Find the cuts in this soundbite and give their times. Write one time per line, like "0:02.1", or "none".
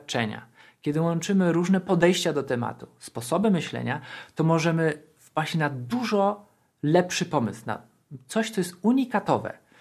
none